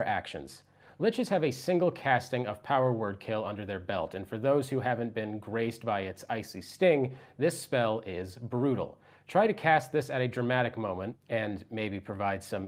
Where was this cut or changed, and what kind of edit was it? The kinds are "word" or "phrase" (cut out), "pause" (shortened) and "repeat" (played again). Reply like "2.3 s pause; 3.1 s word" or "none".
none